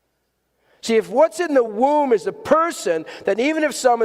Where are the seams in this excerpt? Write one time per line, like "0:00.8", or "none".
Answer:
none